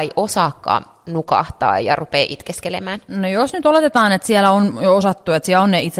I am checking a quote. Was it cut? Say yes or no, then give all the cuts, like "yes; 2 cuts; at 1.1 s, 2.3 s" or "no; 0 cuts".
no; 0 cuts